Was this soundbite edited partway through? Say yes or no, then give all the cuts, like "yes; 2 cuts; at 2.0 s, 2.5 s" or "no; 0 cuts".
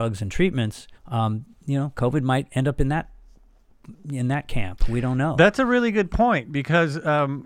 yes; 1 cut; at 0.9 s